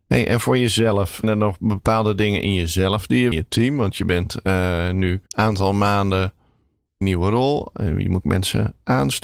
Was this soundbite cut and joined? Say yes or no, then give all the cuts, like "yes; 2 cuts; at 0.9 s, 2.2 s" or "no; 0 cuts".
yes; 5 cuts; at 1.2 s, 3.3 s, 5.3 s, 7.0 s, 8.2 s